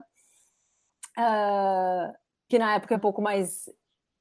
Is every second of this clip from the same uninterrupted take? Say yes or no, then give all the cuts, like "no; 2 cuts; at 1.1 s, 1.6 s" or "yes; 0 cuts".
no; 2 cuts; at 2.5 s, 2.9 s